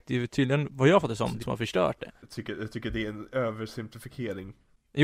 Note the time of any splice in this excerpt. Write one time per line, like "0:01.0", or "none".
0:01.4